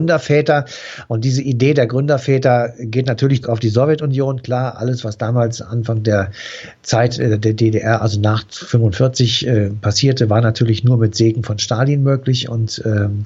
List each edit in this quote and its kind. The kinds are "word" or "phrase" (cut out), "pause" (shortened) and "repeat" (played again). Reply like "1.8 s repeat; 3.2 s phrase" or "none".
3.4 s word